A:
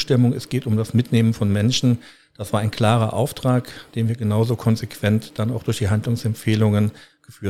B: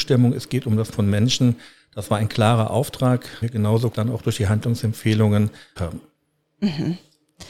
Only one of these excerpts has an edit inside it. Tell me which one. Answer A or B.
B